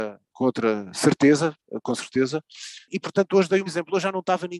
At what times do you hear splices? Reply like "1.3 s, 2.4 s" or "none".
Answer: 3.7 s